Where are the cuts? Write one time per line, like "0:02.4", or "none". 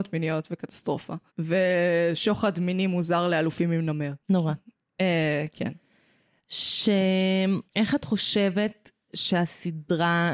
0:01.3
0:04.2
0:07.7